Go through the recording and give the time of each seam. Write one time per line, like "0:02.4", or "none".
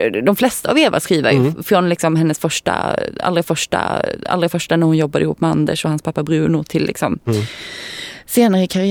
0:03.4